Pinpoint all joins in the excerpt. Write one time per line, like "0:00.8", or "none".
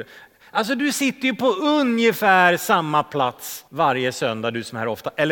0:03.7

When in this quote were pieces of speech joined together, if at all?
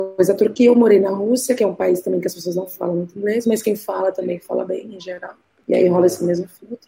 0:05.4

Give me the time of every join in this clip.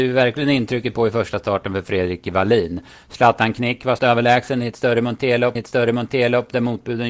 0:04.0
0:05.6

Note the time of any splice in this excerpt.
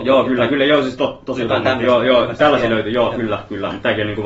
none

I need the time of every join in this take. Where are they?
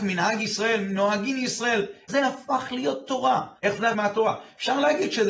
0:02.1
0:03.6
0:03.9

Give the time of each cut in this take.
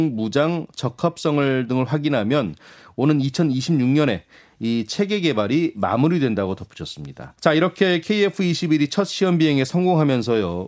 0:07.4

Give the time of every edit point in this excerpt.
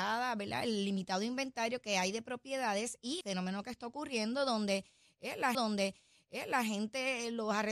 0:03.2
0:05.5

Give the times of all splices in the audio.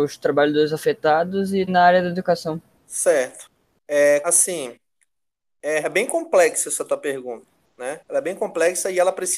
0:01.7
0:02.8
0:04.2
0:05.8

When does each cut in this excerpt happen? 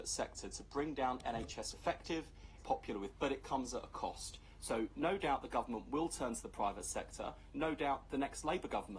0:01.7
0:02.6
0:03.1

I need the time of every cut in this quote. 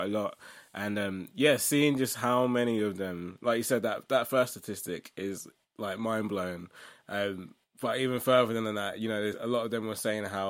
none

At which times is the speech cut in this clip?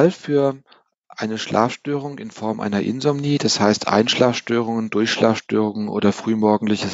none

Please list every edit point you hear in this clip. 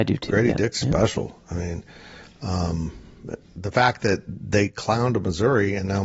0:03.5

